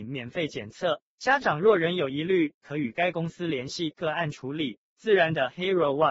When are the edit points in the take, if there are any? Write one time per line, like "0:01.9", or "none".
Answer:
0:01.1
0:04.9

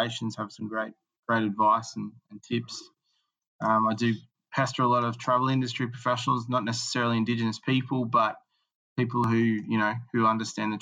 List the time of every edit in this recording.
none

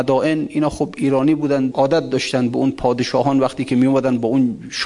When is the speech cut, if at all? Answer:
0:01.7

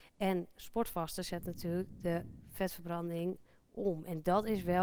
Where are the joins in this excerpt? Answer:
none

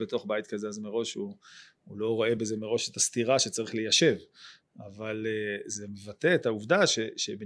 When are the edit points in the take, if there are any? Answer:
none

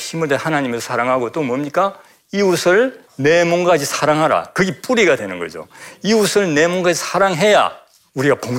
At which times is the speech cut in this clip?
0:03.1

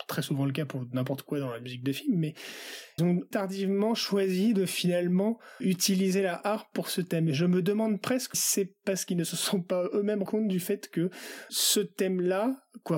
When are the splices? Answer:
0:03.0
0:03.3
0:05.6
0:08.3
0:10.2
0:11.5

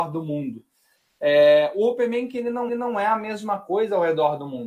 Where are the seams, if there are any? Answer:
0:02.7

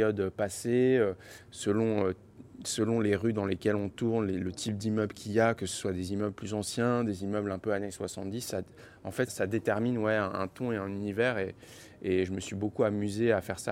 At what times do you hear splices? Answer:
0:09.3

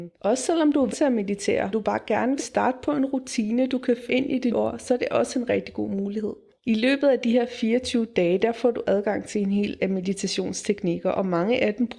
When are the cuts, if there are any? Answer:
0:00.9
0:01.7
0:02.4
0:04.1
0:04.5
0:09.8

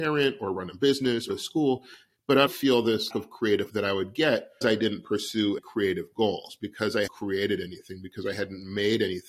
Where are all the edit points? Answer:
0:01.3
0:02.5
0:03.1
0:03.7
0:04.6
0:05.6
0:07.1

